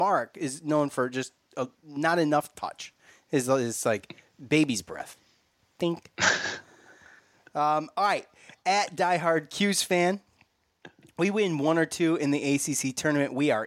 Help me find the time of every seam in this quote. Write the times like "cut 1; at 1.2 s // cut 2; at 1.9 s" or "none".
none

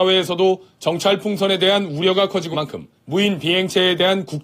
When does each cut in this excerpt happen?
cut 1; at 2.5 s // cut 2; at 3.0 s

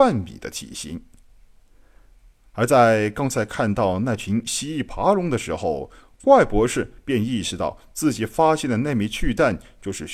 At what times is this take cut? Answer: none

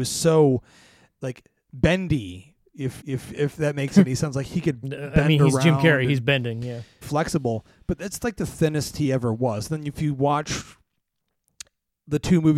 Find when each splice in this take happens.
cut 1; at 3.0 s // cut 2; at 7.0 s

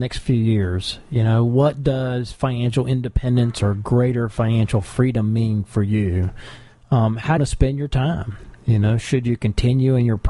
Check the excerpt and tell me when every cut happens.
cut 1; at 7.4 s

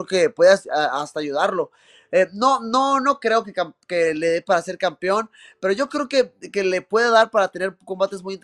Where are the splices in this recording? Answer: none

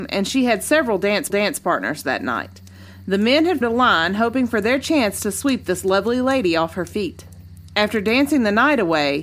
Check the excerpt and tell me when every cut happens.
cut 1; at 1.3 s // cut 2; at 3.6 s

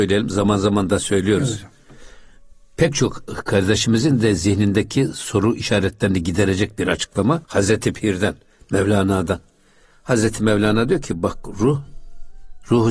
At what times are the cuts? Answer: cut 1; at 7.4 s

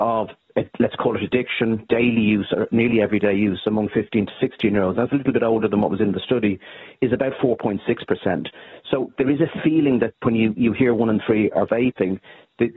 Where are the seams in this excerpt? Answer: none

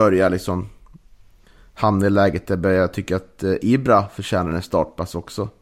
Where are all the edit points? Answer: none

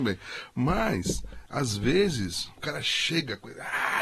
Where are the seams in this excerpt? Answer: none

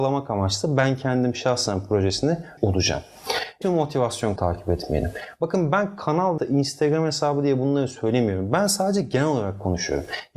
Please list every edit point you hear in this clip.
cut 1; at 2.6 s // cut 2; at 3.6 s // cut 3; at 4.4 s // cut 4; at 6.4 s

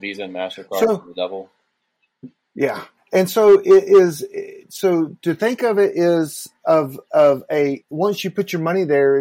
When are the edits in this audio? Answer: cut 1; at 3.0 s

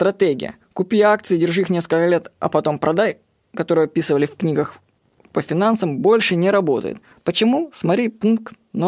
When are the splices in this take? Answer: none

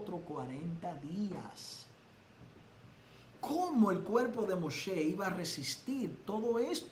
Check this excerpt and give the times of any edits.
none

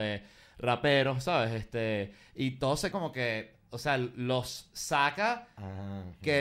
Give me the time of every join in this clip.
cut 1; at 2.9 s

